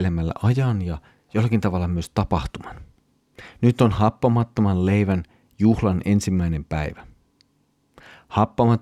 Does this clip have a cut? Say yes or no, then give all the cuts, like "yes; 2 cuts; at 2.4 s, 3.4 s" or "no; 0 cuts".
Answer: no; 0 cuts